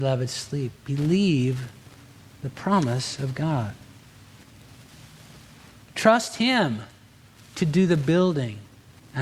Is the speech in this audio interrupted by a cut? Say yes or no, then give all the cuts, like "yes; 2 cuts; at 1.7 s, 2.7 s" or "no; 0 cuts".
no; 0 cuts